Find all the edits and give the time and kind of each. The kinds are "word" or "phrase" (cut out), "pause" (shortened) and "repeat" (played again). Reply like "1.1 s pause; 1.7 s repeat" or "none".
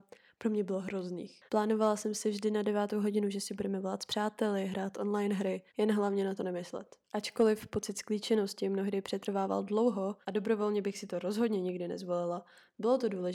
1.5 s pause; 5.7 s pause; 7.0 s pause; 10.2 s pause